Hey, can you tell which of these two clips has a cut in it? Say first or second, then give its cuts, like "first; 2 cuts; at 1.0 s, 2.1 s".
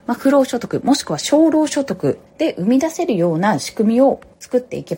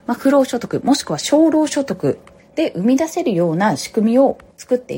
first; 1 cut; at 2.3 s